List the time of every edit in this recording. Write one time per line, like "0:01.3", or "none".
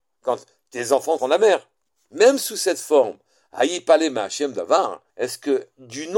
0:01.2
0:05.1